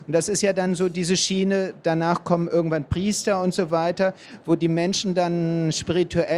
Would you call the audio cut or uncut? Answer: uncut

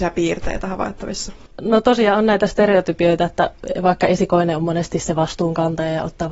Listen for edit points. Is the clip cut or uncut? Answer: cut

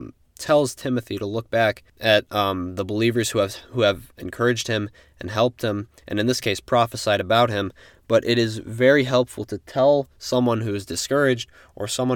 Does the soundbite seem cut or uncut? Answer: uncut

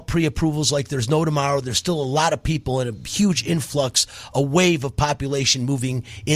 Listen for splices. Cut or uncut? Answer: uncut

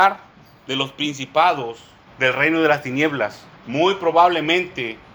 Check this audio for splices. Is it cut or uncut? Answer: cut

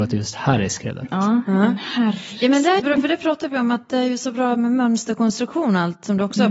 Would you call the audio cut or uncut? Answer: cut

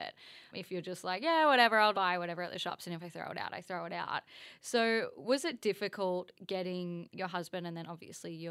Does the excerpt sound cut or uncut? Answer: cut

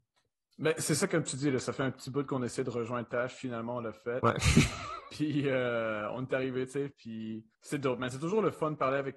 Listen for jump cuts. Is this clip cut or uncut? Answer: cut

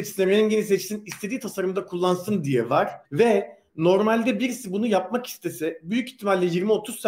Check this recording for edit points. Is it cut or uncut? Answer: cut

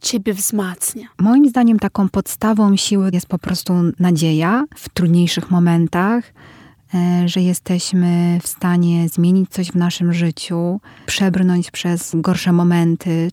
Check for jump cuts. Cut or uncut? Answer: cut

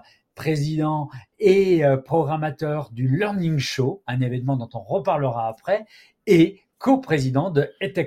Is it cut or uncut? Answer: uncut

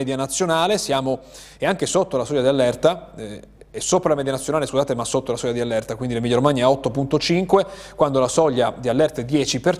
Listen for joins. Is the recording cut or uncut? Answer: uncut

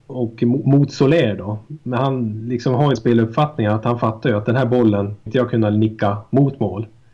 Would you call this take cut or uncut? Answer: cut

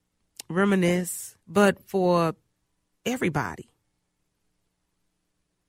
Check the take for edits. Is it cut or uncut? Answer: cut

